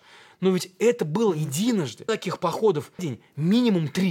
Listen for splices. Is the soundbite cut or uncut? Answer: cut